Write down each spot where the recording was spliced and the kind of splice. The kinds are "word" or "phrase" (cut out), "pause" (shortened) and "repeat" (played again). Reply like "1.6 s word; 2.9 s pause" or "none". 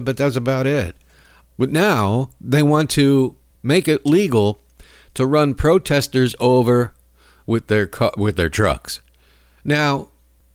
none